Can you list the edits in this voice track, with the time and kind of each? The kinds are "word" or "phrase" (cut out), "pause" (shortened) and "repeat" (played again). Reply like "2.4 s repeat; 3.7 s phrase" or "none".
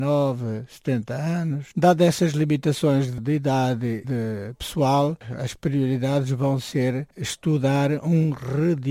1.7 s pause; 4.0 s word